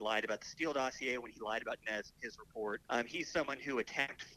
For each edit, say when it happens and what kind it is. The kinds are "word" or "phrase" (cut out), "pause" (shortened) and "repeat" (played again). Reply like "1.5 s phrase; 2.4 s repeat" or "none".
1.8 s word; 2.8 s pause